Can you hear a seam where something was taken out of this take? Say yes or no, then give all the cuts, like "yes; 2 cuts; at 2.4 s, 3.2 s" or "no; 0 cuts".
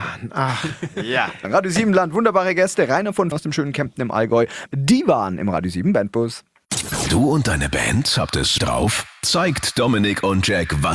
yes; 3 cuts; at 3.3 s, 4.7 s, 8.6 s